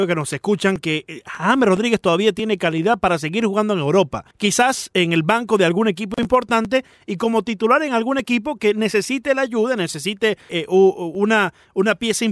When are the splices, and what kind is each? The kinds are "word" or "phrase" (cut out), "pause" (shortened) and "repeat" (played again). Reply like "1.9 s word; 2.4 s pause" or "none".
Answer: 4.3 s pause; 10.5 s word